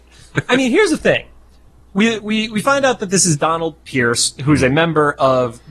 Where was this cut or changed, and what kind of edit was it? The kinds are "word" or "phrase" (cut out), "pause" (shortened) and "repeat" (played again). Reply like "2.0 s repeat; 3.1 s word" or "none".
none